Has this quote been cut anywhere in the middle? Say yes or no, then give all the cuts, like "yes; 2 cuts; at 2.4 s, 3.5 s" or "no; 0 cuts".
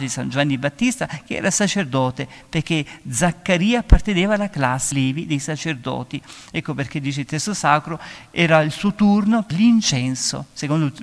yes; 2 cuts; at 4.9 s, 9.5 s